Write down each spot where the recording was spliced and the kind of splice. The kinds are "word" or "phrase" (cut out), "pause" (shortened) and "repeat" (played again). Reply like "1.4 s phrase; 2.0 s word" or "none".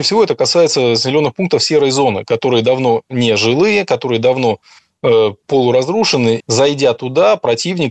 6.4 s word